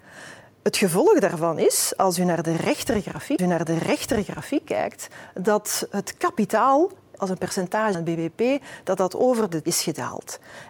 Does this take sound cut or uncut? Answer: cut